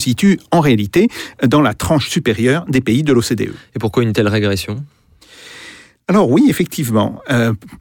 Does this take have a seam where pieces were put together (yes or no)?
no